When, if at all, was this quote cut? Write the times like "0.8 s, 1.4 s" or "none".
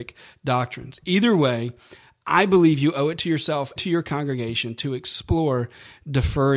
3.8 s